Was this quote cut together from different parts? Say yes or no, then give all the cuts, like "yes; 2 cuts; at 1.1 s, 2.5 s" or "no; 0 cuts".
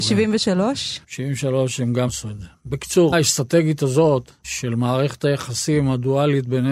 yes; 3 cuts; at 1.0 s, 2.1 s, 3.1 s